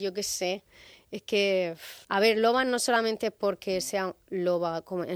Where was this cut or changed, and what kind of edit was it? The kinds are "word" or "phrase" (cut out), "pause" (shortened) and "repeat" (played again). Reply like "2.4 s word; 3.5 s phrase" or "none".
2.0 s pause